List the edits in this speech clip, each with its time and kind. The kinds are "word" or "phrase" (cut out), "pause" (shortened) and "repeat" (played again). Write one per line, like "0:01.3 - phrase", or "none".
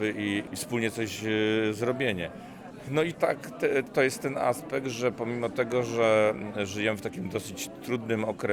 0:03.1 - phrase